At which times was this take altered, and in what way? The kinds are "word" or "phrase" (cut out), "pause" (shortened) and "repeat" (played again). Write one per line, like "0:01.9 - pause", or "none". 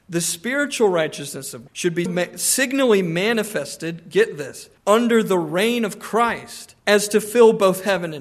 0:01.7 - word
0:02.1 - word
0:04.8 - pause
0:06.8 - pause